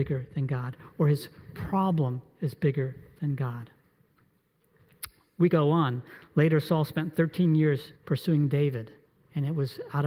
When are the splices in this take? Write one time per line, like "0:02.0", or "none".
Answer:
0:05.5
0:08.0
0:09.1